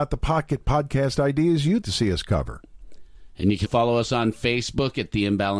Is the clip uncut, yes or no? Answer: no